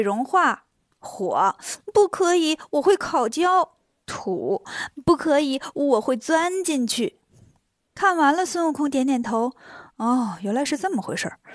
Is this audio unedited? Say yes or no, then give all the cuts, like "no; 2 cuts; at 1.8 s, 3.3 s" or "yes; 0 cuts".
yes; 0 cuts